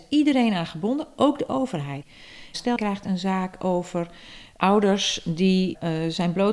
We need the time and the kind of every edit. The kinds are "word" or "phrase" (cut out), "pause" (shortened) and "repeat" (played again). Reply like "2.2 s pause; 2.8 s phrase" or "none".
2.8 s word